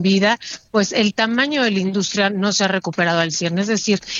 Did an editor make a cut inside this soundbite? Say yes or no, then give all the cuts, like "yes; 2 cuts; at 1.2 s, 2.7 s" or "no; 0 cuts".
no; 0 cuts